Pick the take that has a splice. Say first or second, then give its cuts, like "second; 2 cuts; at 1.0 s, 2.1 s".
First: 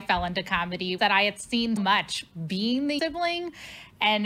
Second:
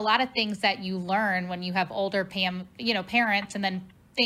first; 3 cuts; at 1.0 s, 1.8 s, 3.0 s